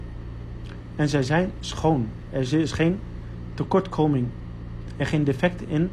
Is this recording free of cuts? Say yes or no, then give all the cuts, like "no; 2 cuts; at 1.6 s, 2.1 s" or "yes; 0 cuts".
yes; 0 cuts